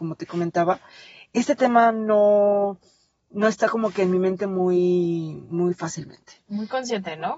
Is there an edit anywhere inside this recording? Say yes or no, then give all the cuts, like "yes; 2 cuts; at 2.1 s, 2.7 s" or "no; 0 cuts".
no; 0 cuts